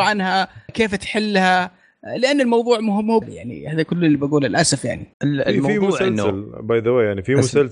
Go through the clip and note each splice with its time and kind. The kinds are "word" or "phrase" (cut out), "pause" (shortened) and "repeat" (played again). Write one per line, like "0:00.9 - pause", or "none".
0:03.2 - word
0:05.1 - pause